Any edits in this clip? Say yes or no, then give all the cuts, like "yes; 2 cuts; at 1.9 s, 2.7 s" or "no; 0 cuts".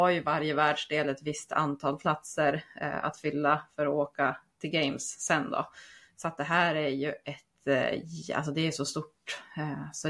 no; 0 cuts